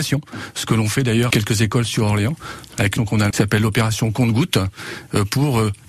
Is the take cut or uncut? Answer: cut